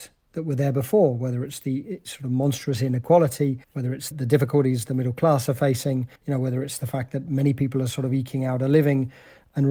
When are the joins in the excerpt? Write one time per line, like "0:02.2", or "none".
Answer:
0:03.6
0:04.1
0:06.2